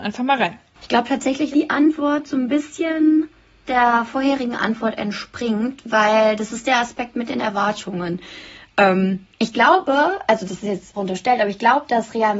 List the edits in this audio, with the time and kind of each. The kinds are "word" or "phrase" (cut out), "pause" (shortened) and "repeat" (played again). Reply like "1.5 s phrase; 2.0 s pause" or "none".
1.5 s word; 3.7 s word; 9.3 s pause; 10.9 s word

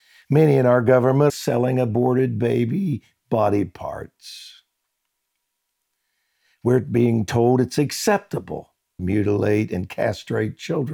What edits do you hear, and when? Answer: 1.3 s phrase; 9.0 s word

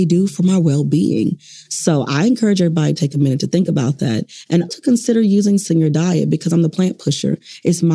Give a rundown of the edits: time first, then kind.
4.7 s word; 5.7 s word

